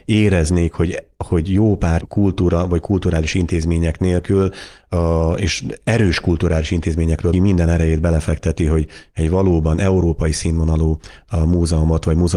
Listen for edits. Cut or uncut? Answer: cut